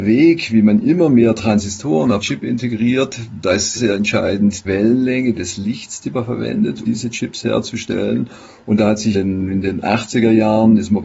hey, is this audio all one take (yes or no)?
no